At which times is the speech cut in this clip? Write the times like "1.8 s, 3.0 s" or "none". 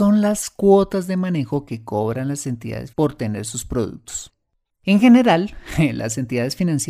2.9 s